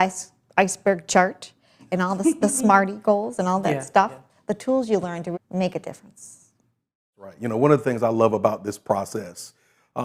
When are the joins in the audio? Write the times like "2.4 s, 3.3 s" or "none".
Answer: 5.3 s